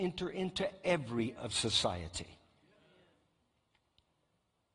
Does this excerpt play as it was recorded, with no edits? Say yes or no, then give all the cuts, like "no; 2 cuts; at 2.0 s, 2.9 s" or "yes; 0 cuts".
no; 1 cut; at 1.4 s